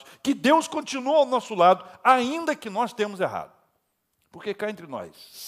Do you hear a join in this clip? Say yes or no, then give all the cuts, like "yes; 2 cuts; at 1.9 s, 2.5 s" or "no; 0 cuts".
no; 0 cuts